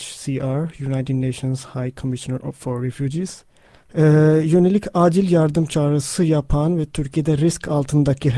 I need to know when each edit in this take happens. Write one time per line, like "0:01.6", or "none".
0:03.7